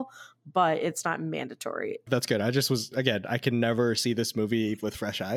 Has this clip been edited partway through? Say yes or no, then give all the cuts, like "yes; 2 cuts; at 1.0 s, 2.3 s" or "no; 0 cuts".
yes; 1 cut; at 2.9 s